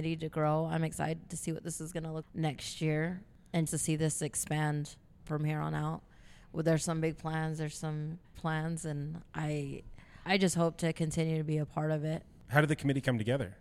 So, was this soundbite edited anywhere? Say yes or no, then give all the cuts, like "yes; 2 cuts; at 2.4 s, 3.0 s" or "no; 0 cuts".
yes; 4 cuts; at 2.2 s, 3.7 s, 8.3 s, 10.3 s